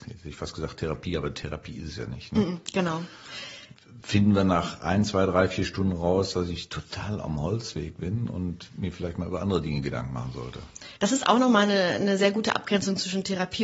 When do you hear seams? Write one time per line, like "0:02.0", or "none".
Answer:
0:11.0